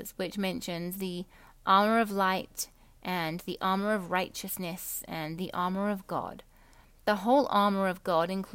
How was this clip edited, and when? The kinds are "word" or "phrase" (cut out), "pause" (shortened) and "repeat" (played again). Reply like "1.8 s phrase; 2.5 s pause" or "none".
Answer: none